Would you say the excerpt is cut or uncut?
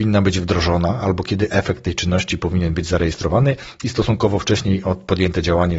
uncut